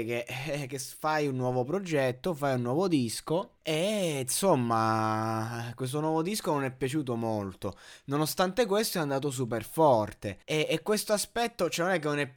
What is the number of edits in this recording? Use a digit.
2